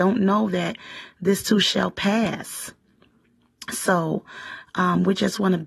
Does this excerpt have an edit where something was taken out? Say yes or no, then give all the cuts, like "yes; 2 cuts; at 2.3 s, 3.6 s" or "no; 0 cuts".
no; 0 cuts